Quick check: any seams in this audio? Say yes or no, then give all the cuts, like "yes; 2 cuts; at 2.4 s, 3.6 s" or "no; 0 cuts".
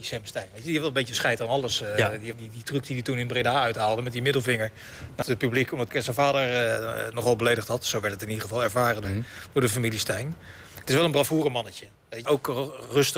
yes; 5 cuts; at 2.3 s, 5.2 s, 5.9 s, 9.0 s, 12.2 s